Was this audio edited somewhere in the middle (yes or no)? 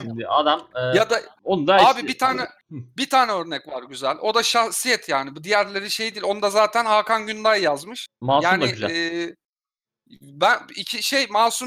no